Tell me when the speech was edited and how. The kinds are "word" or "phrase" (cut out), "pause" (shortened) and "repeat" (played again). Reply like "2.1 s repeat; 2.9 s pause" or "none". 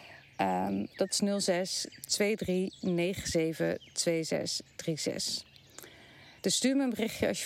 6.4 s pause